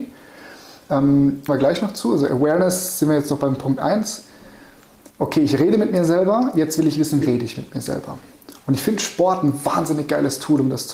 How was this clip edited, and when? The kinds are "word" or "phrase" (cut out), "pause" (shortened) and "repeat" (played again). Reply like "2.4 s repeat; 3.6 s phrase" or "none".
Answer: 1.5 s word; 5.1 s pause; 7.2 s word